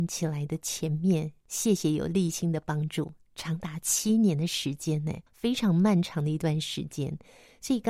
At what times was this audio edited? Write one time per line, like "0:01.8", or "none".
0:05.3

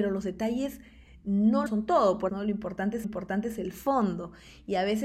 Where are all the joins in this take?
0:01.7
0:02.3
0:03.0

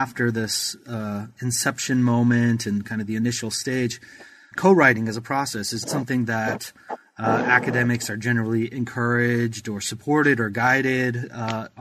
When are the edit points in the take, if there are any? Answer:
0:04.5
0:05.8

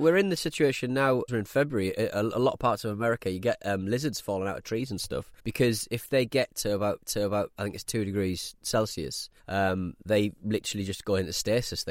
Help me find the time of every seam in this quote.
0:01.3
0:05.4
0:07.0
0:09.4

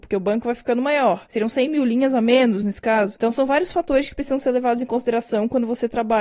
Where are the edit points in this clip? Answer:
none

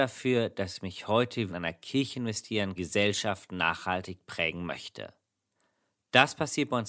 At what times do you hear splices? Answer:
0:01.5
0:02.8

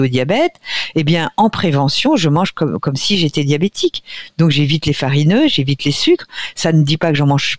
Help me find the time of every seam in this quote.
none

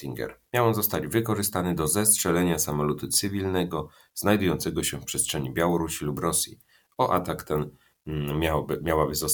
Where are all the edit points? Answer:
none

